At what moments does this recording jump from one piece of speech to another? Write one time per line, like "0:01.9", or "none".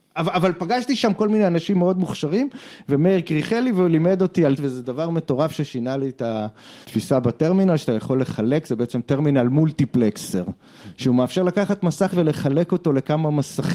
0:04.6
0:06.8
0:12.1